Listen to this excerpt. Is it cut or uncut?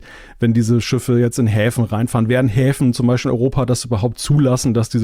uncut